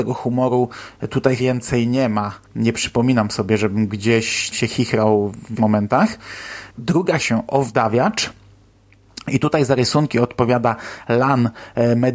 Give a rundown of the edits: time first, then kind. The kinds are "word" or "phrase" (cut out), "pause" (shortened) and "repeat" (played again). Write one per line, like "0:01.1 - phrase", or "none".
0:01.4 - word
0:02.4 - pause
0:04.5 - word
0:05.6 - word
0:07.2 - phrase